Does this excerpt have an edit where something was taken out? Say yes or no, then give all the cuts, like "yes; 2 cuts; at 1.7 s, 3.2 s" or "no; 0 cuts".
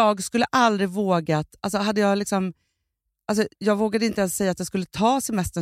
yes; 1 cut; at 3.5 s